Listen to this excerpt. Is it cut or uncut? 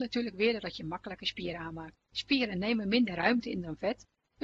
cut